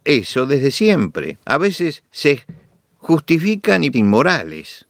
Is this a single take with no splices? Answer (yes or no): no